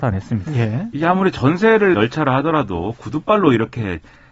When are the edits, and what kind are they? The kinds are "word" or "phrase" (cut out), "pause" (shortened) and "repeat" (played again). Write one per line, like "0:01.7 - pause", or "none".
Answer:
0:01.9 - word